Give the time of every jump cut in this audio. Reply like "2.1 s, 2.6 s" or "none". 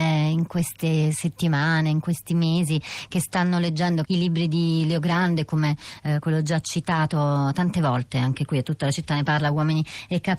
4.1 s